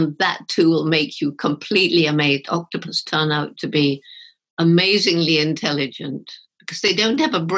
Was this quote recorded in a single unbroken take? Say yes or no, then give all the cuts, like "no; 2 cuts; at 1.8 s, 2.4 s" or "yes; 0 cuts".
yes; 0 cuts